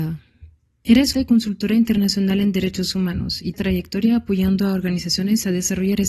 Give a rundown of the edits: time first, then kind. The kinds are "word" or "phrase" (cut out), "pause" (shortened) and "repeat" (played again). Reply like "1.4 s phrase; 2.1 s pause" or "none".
1.1 s phrase; 3.5 s phrase